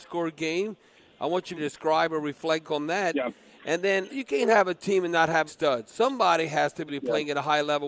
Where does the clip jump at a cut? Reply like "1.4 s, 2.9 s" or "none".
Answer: 1.5 s, 2.6 s, 4.1 s, 5.5 s, 6.9 s